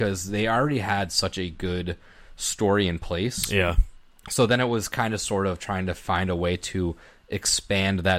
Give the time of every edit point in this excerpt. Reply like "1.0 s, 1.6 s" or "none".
none